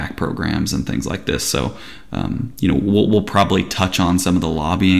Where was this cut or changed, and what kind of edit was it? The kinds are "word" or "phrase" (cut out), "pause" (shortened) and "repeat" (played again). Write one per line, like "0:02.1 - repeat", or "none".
none